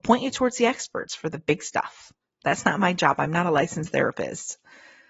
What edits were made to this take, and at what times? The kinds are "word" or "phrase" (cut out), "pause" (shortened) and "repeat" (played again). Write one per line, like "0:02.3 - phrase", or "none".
none